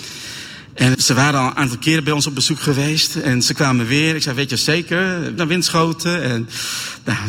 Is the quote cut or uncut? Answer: cut